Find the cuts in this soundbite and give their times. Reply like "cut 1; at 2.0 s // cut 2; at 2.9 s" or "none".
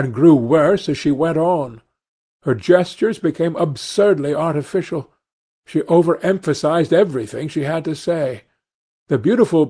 none